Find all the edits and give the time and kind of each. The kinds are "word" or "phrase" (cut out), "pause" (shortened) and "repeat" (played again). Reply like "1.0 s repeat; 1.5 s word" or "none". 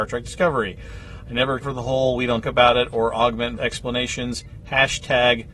1.6 s word; 2.4 s word; 3.6 s word